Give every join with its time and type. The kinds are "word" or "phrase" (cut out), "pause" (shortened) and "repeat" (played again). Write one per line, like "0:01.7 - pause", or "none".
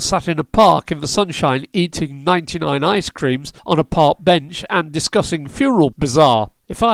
0:05.9 - word